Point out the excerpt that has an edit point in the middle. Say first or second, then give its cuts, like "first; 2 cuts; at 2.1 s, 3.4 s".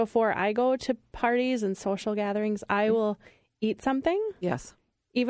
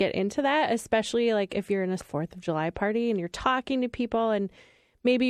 second; 1 cut; at 2.0 s